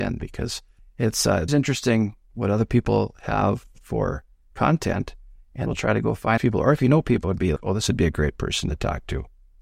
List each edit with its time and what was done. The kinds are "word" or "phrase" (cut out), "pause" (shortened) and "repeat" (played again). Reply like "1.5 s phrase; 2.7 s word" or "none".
1.5 s word; 5.7 s word; 6.4 s word; 7.2 s word; 7.6 s word

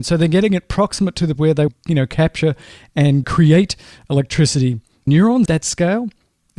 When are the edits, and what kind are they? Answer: 1.4 s word; 1.7 s word; 3.2 s word; 5.1 s word; 5.5 s word

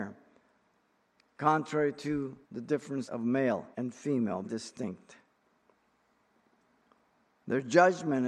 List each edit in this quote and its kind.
2.4 s pause; 3.1 s word; 3.7 s pause; 4.4 s word

